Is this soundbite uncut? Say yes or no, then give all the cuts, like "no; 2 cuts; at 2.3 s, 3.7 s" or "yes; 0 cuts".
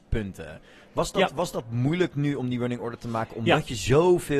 yes; 0 cuts